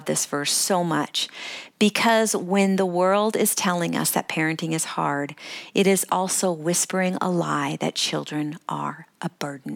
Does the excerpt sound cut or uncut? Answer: uncut